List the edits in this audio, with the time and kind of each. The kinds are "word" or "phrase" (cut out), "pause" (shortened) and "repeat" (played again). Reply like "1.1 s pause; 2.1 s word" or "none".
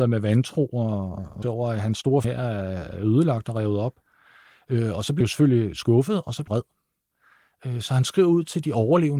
1.4 s word; 2.2 s word; 5.2 s word; 6.5 s word